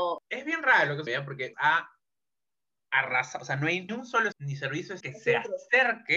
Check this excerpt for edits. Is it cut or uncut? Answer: cut